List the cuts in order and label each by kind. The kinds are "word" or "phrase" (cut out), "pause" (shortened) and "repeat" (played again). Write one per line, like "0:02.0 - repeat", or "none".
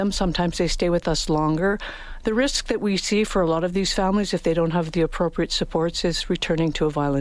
none